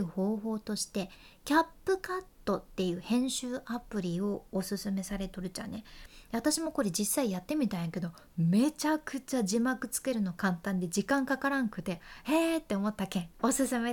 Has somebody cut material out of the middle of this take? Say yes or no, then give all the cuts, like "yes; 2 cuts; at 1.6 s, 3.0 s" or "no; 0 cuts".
no; 0 cuts